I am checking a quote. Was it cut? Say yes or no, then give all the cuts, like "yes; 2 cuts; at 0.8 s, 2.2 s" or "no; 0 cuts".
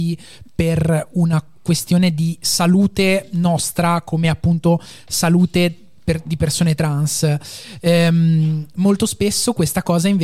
no; 0 cuts